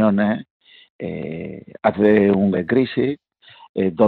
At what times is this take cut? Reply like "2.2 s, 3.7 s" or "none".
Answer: 1.9 s, 2.5 s